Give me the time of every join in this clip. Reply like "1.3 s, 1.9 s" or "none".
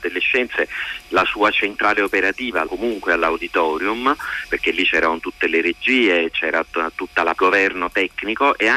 2.7 s, 4.5 s, 7.3 s